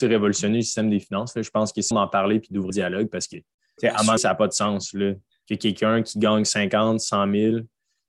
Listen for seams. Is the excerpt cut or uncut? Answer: cut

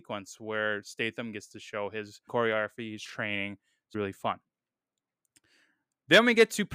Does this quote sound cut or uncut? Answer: cut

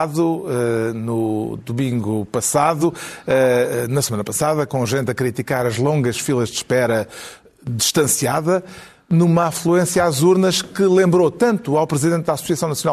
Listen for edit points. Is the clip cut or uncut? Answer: uncut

